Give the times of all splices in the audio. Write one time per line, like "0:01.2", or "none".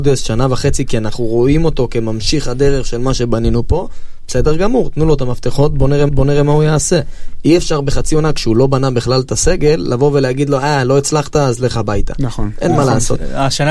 0:06.1